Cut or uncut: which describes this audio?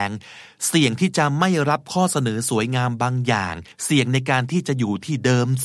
cut